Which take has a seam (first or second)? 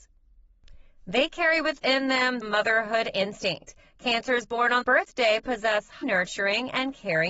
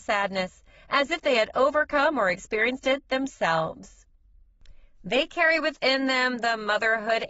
first